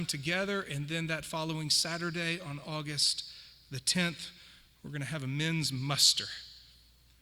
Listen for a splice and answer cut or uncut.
uncut